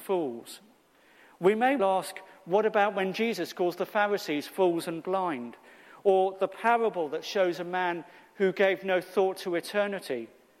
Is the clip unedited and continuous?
no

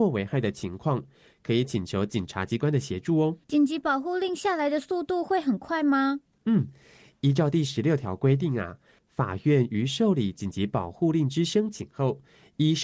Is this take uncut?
no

